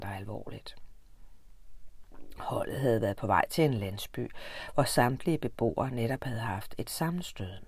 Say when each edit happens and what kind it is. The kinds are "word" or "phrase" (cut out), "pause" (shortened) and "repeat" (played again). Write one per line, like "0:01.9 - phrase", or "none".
none